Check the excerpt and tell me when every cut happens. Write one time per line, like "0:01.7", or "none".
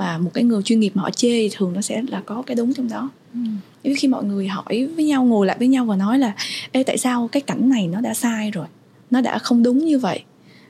none